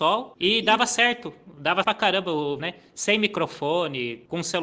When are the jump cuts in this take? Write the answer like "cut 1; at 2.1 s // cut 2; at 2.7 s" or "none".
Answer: cut 1; at 1.8 s // cut 2; at 2.6 s